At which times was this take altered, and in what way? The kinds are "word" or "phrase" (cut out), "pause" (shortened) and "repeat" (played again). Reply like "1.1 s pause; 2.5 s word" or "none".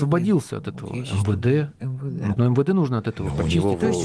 2.4 s word